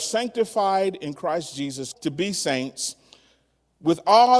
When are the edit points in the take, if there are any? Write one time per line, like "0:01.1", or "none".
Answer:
0:01.9